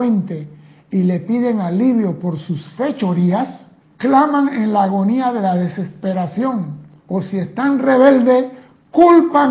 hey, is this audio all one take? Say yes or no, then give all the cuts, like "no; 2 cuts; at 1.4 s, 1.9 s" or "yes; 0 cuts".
no; 2 cuts; at 3.8 s, 7.0 s